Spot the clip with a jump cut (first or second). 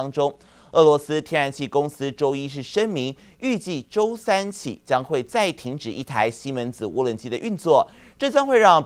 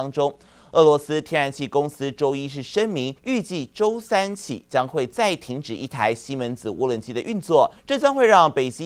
second